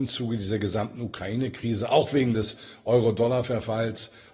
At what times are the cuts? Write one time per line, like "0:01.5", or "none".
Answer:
none